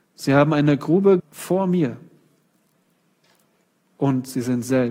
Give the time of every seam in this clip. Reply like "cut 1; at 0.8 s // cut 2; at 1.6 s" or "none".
cut 1; at 1.2 s

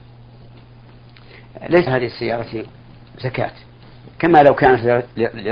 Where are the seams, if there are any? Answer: cut 1; at 1.9 s // cut 2; at 4.1 s

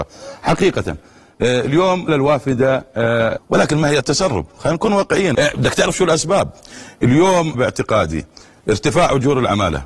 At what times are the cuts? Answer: cut 1; at 2.1 s // cut 2; at 3.4 s // cut 3; at 4.0 s // cut 4; at 5.3 s // cut 5; at 7.5 s

